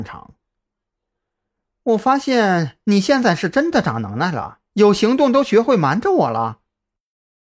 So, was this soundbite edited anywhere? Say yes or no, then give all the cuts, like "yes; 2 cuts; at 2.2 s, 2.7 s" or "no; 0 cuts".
yes; 1 cut; at 4.7 s